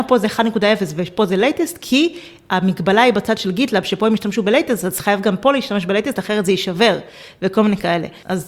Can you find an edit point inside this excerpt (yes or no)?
no